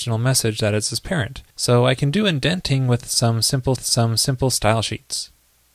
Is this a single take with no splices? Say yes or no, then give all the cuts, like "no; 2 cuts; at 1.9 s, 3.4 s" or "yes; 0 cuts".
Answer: no; 2 cuts; at 1.5 s, 3.8 s